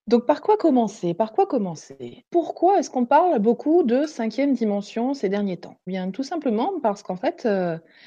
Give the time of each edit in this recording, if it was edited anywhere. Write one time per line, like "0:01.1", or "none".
0:02.3
0:05.9